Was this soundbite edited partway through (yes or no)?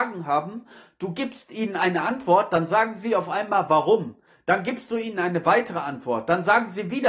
no